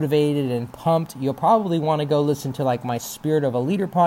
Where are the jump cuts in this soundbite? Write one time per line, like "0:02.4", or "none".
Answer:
none